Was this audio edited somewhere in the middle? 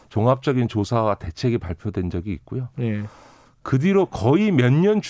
no; 0 cuts

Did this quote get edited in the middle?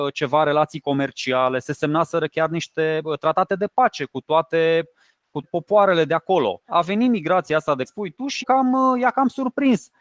yes; 4 cuts; at 5.4 s, 6.7 s, 7.9 s, 8.4 s

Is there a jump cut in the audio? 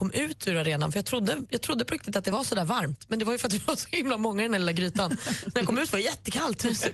no; 0 cuts

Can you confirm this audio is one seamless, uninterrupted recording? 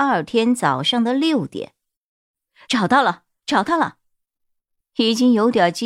yes; 0 cuts

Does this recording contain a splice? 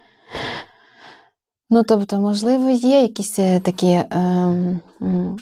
no; 0 cuts

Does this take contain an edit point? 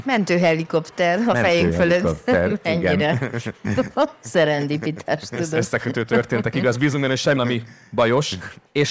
yes; 1 cut; at 7.4 s

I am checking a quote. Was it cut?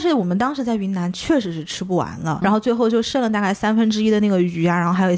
yes; 1 cut; at 2.4 s

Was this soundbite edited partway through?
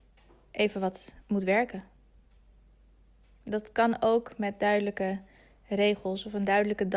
no; 0 cuts

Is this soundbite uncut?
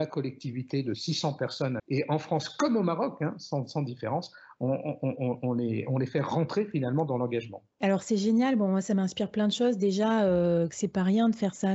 no; 2 cuts; at 1.8 s, 7.7 s

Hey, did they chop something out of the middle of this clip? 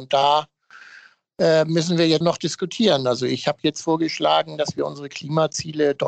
yes; 1 cut; at 2.2 s

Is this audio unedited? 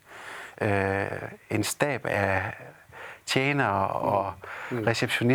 yes; 0 cuts

